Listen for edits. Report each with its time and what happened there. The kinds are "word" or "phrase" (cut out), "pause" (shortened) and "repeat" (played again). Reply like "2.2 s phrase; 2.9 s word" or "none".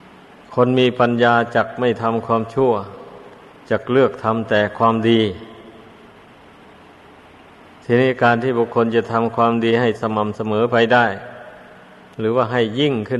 none

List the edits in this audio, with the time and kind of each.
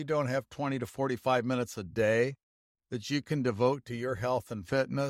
none

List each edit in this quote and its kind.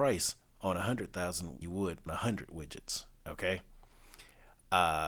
1.6 s phrase; 2.1 s word; 3.1 s pause

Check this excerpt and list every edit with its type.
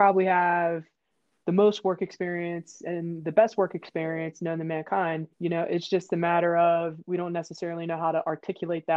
5.3 s pause

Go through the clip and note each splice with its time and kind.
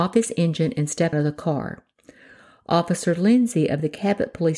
1.1 s word

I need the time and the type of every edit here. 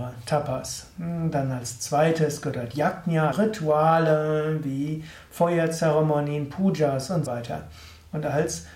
3.3 s word; 7.3 s word

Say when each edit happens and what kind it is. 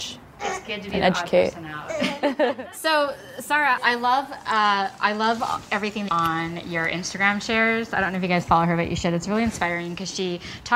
3.8 s word; 6.1 s phrase

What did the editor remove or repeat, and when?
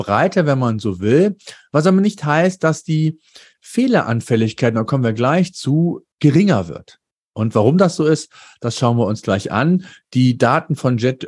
6.1 s pause

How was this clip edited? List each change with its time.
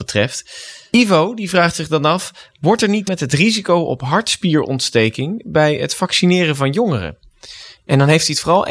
3.1 s phrase

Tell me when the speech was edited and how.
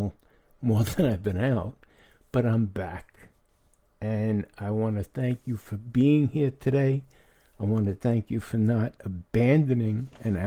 none

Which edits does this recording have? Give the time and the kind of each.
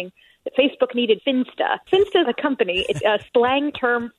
1.2 s phrase; 1.9 s word; 2.2 s word; 3.0 s word

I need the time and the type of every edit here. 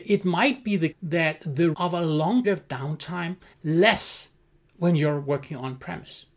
0.9 s word; 1.7 s word; 2.4 s word; 3.5 s word

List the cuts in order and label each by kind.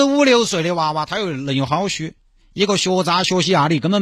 none

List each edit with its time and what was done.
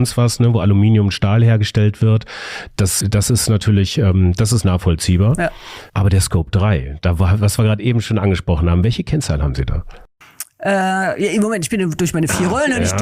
3.0 s word; 5.9 s pause

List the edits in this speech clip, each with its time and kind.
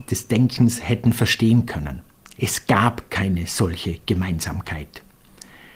none

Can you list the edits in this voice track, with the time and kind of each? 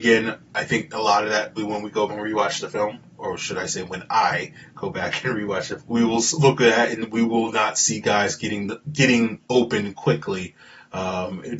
1.6 s word; 2.1 s word; 5.8 s word

